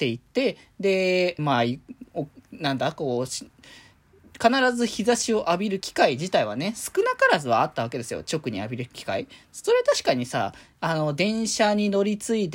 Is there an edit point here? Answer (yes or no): yes